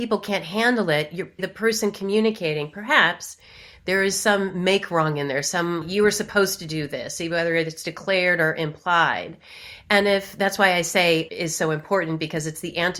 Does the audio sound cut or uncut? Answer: cut